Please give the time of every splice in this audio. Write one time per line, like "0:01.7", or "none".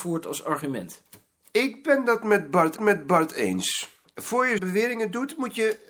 0:02.8
0:04.6